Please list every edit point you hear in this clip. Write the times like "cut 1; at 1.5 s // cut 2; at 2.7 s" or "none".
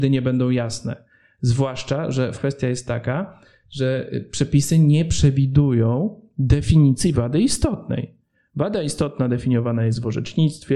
cut 1; at 2.3 s